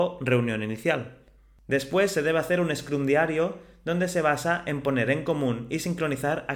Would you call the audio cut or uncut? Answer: uncut